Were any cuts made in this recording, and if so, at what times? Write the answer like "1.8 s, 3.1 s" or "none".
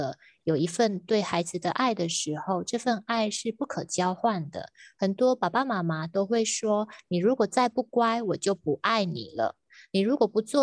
none